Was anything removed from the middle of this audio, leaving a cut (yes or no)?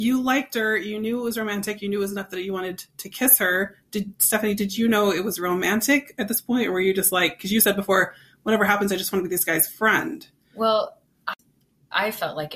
no